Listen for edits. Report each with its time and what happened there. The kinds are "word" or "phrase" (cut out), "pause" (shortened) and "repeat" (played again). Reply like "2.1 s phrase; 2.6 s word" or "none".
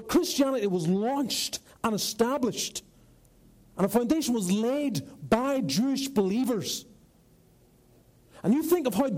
none